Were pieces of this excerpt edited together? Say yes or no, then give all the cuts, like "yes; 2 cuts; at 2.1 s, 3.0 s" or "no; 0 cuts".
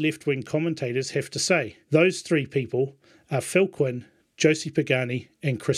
yes; 1 cut; at 1.8 s